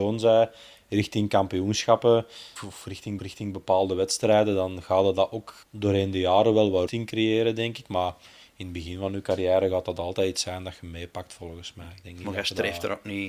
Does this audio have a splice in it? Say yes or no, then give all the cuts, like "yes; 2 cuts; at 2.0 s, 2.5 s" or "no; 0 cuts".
yes; 4 cuts; at 2.6 s, 3.2 s, 5.6 s, 6.9 s